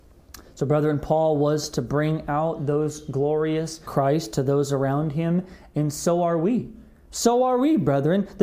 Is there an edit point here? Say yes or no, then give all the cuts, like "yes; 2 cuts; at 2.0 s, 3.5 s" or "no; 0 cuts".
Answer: yes; 1 cut; at 3.8 s